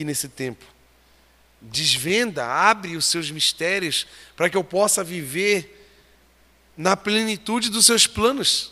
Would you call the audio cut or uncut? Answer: uncut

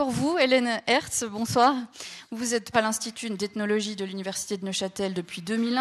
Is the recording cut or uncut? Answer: cut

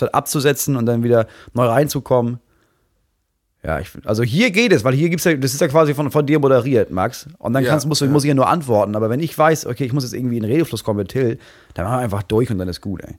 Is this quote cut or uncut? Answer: uncut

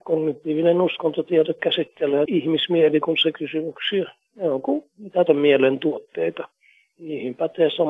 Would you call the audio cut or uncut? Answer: cut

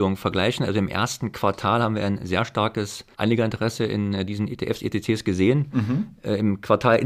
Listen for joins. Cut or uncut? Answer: cut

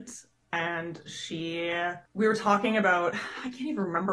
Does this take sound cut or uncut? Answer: cut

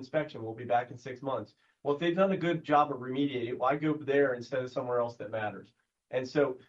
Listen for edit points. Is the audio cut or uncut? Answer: uncut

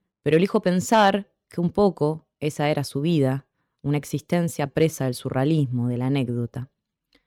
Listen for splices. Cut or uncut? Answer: uncut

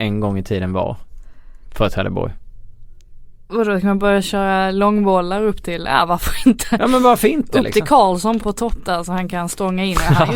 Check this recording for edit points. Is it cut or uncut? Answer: cut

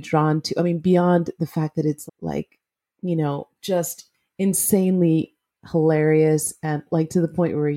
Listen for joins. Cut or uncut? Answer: cut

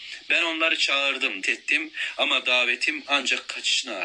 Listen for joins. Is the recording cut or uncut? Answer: cut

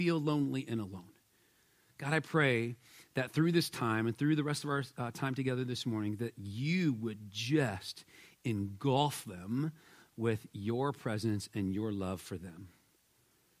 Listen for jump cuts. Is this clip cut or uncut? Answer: uncut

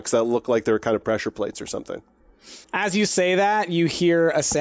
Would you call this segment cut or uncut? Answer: cut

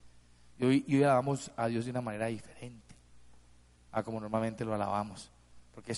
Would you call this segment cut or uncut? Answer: uncut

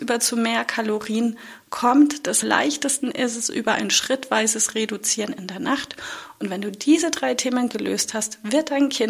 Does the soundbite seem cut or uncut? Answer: cut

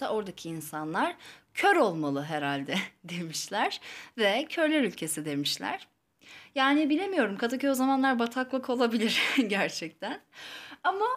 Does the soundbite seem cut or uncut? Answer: uncut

